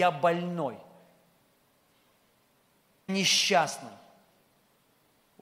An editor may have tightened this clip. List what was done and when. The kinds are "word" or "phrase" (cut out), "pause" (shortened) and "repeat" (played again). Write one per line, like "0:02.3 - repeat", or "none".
0:03.1 - word

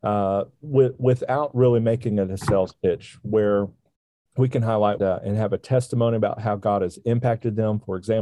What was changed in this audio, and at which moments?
0:05.0 - phrase

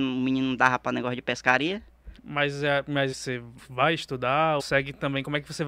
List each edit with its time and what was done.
0:02.2 - pause
0:03.1 - word
0:03.6 - pause
0:04.6 - word

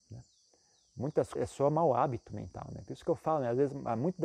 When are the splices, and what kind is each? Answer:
0:01.4 - word

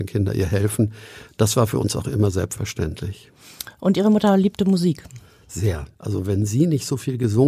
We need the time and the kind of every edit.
0:05.9 - pause

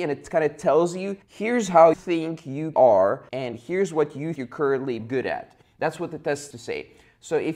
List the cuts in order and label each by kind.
0:01.2 - pause
0:01.9 - word
0:02.7 - word
0:03.3 - pause
0:04.4 - word
0:05.0 - word
0:06.5 - word

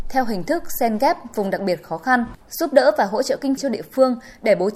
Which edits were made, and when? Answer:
0:02.4 - pause
0:03.6 - word

